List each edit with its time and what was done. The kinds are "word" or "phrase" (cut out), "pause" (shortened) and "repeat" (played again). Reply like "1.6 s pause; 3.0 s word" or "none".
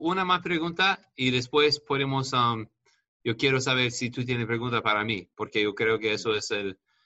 none